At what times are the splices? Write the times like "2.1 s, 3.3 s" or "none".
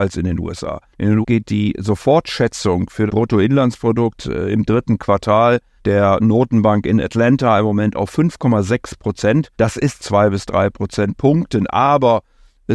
0.9 s, 1.2 s, 3.1 s, 5.8 s, 9.5 s, 10.0 s